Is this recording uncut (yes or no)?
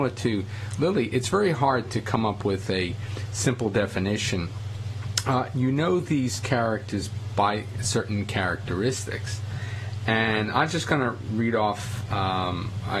yes